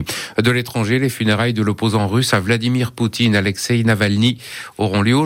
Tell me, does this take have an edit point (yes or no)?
no